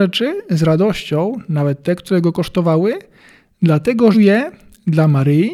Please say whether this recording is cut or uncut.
cut